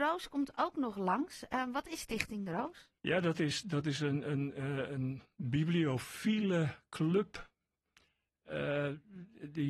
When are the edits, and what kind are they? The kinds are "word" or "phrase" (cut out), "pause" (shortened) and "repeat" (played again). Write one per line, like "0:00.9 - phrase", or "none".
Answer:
0:03.0 - pause
0:05.3 - pause